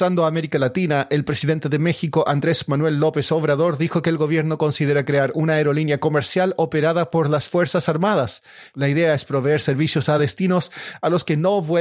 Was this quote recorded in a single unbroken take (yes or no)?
yes